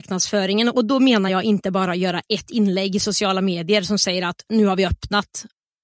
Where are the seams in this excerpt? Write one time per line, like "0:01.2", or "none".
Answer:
none